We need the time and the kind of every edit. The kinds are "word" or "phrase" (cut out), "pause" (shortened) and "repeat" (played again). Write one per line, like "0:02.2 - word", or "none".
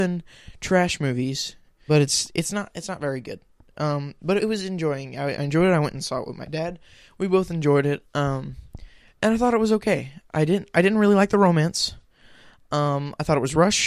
0:01.9 - word
0:04.4 - word